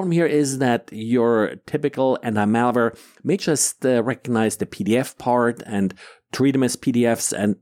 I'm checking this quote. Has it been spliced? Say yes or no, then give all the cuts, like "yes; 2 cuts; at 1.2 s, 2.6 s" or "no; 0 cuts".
no; 0 cuts